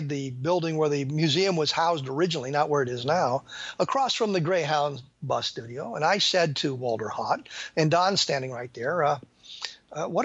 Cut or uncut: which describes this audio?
uncut